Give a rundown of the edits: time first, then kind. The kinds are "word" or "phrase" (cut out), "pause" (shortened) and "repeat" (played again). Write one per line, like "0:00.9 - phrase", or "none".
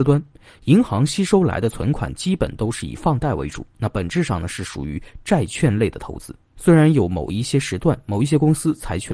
none